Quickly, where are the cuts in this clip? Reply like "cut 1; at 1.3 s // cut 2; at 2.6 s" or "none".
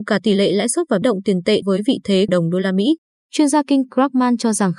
cut 1; at 1.0 s // cut 2; at 1.6 s // cut 3; at 2.3 s // cut 4; at 3.9 s